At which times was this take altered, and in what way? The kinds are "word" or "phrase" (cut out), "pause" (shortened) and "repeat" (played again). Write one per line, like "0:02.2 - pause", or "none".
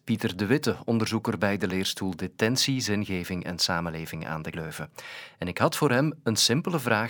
0:04.5 - word